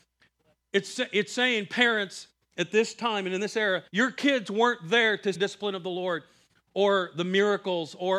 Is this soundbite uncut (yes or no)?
no